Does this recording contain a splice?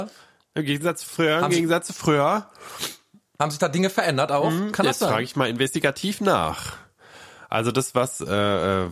no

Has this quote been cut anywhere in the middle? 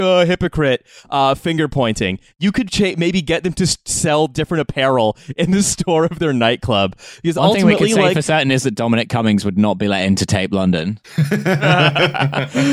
no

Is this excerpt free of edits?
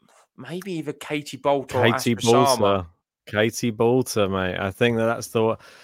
yes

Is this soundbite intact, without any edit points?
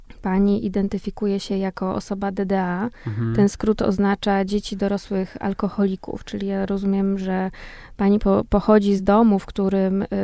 yes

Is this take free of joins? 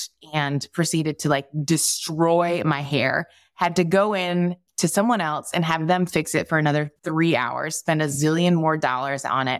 yes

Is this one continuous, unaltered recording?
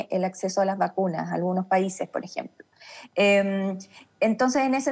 yes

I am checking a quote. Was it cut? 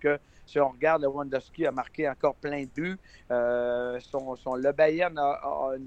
no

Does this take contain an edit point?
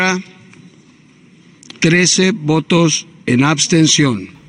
yes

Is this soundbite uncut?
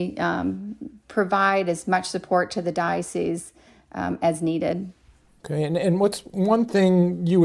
yes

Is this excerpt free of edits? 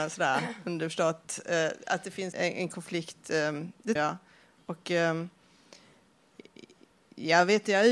no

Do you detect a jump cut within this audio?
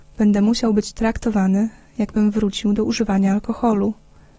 no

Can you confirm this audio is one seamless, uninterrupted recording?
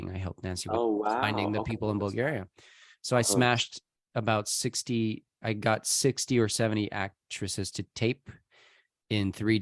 no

